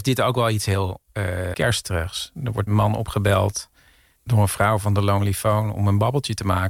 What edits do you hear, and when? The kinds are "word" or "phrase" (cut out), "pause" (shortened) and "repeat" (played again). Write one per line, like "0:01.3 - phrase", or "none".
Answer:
0:01.5 - word
0:02.7 - word
0:04.2 - word